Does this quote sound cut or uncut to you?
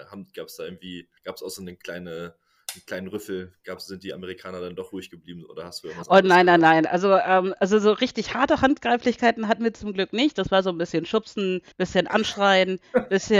cut